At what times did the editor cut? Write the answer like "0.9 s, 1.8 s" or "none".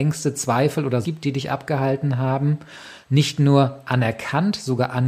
1.0 s, 3.0 s